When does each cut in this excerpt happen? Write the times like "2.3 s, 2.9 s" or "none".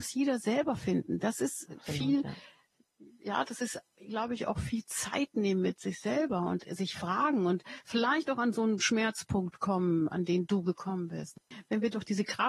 none